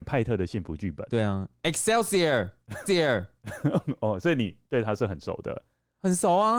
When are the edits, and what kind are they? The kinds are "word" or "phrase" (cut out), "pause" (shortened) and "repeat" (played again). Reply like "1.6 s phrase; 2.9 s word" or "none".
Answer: 2.9 s repeat

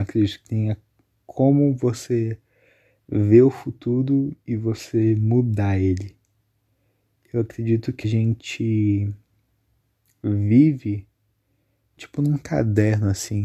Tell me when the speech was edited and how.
8.0 s word; 12.0 s word

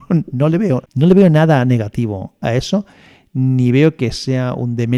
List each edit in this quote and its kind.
none

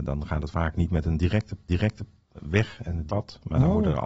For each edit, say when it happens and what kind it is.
1.7 s repeat; 3.1 s word

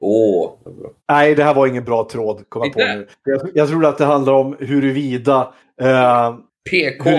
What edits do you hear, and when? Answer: 1.0 s pause

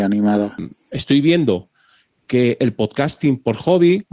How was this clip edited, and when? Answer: none

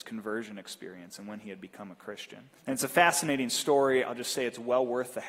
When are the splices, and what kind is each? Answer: 2.6 s pause

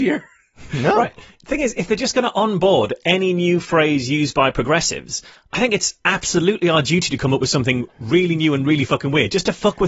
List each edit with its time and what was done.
none

